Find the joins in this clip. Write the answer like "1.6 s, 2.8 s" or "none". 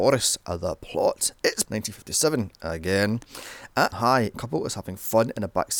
1.7 s, 3.9 s, 4.3 s